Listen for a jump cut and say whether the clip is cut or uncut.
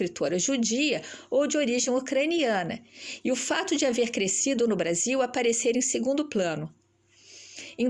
uncut